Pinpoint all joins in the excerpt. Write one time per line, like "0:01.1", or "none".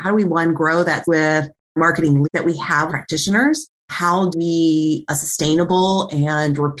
0:01.0
0:02.2
0:02.9
0:04.3
0:05.1